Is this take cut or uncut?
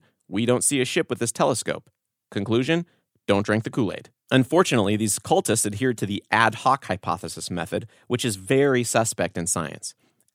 uncut